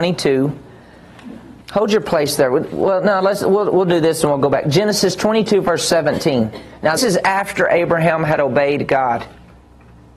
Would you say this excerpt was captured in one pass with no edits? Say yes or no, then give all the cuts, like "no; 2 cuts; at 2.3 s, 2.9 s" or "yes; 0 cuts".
no; 2 cuts; at 1.6 s, 7.0 s